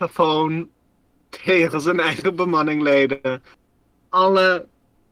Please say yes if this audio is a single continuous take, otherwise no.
yes